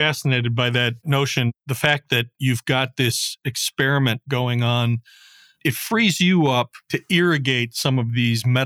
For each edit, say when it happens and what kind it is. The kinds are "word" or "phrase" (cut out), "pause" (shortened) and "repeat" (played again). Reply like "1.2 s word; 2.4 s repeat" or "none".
none